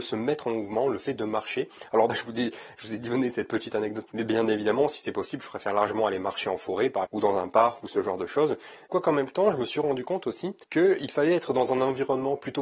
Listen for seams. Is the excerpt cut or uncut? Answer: cut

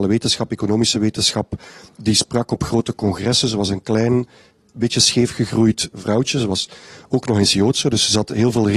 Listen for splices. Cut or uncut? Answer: uncut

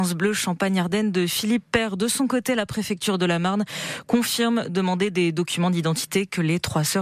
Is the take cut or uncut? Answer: uncut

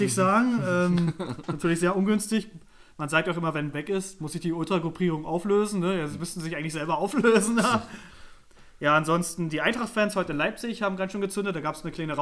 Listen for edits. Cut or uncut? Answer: cut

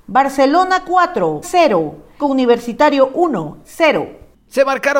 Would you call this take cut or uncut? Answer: cut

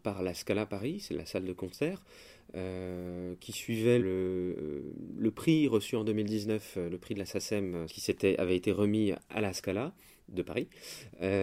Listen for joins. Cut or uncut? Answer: cut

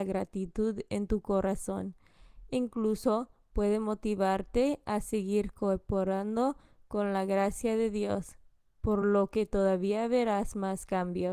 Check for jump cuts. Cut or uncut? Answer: uncut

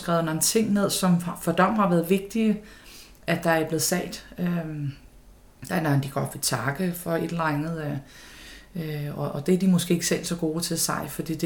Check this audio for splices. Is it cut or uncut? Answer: uncut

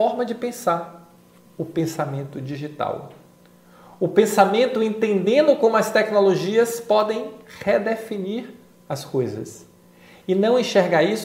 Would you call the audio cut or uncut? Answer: uncut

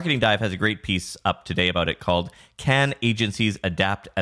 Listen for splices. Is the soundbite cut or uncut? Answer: uncut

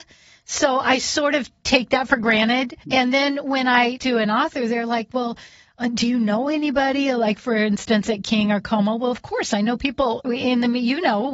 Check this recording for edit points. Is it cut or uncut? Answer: cut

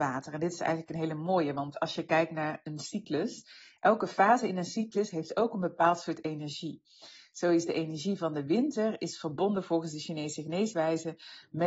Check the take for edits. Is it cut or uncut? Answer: uncut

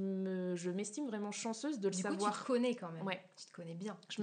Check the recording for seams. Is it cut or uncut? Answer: uncut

